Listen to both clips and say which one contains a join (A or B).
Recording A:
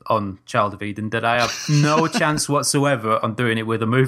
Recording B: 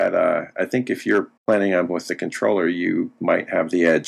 B